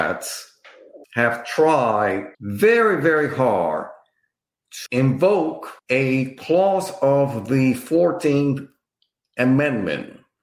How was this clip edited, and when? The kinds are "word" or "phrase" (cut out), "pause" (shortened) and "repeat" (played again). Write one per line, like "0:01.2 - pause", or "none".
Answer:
0:01.0 - pause
0:02.3 - pause
0:04.9 - word
0:05.8 - pause

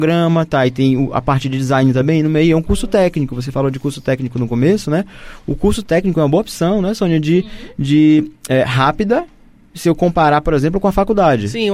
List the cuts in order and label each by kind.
none

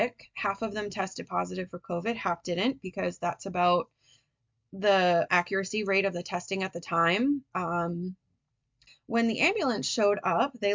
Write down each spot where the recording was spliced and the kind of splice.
0:05.3 - word
0:08.9 - word

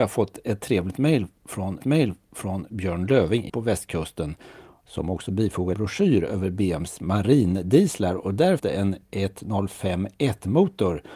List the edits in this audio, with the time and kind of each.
0:01.8 - repeat
0:03.5 - word
0:05.7 - word
0:08.6 - word

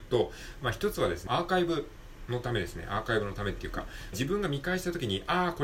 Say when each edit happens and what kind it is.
0:01.3 - phrase
0:04.1 - phrase

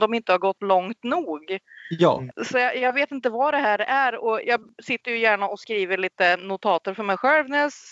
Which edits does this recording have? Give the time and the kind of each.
0:02.3 - pause
0:04.4 - word

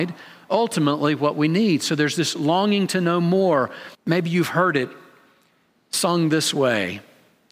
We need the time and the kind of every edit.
0:03.9 - pause

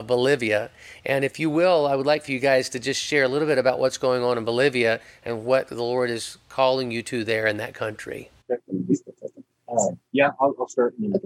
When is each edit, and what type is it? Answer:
0:08.4 - pause

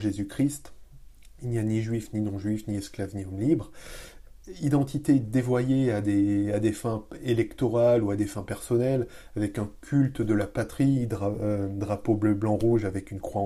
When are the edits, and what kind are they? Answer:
none

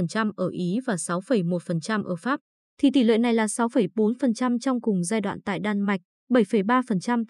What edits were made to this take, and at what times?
none

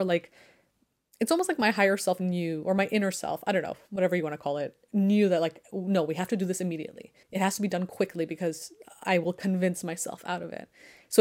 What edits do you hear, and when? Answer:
0:07.2 - pause

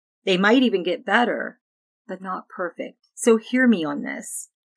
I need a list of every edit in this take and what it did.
0:02.2 - word
0:03.1 - pause

